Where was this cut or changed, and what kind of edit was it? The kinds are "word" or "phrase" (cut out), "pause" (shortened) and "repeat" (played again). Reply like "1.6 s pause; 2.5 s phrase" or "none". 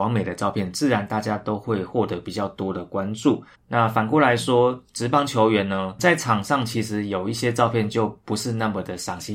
3.5 s pause